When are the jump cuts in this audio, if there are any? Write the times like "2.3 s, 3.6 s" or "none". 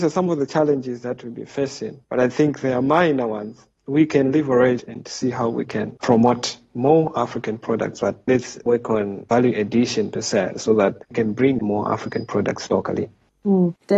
2.0 s, 11.0 s